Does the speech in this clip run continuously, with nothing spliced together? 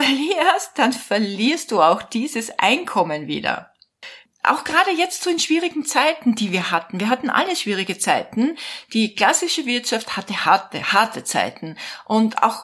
yes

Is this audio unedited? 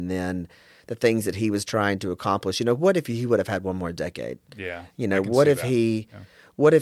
yes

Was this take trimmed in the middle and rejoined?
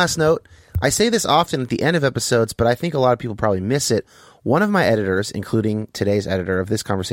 no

